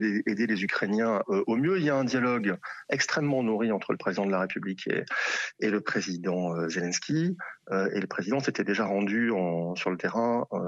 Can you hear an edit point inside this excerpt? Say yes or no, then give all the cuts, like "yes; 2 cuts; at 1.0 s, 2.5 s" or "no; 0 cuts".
no; 0 cuts